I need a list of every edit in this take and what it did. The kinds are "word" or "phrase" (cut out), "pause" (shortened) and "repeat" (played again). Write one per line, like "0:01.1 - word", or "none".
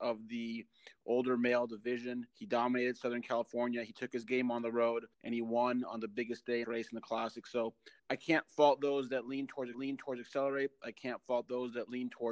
0:02.3 - pause
0:05.1 - pause
0:06.6 - phrase
0:08.0 - pause
0:09.7 - repeat